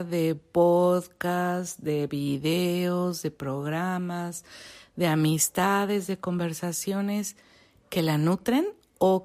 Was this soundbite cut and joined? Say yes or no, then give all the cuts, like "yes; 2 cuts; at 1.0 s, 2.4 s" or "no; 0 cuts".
no; 0 cuts